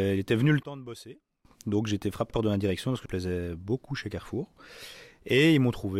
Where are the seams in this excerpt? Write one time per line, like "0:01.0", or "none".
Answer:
0:02.3
0:03.0